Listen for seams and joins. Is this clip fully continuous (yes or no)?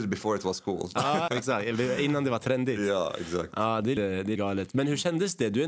no